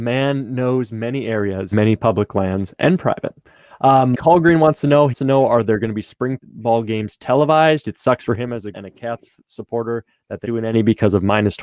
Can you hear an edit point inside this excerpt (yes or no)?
yes